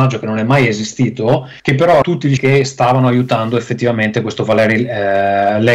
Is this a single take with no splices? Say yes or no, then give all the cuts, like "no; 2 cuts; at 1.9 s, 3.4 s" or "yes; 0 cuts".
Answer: no; 3 cuts; at 1.6 s, 2.0 s, 2.4 s